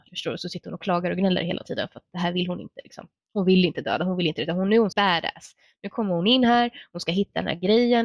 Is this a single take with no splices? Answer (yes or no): no